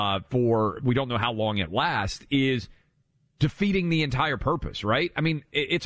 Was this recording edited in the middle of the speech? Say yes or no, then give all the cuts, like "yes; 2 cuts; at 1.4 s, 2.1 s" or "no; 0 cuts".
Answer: no; 0 cuts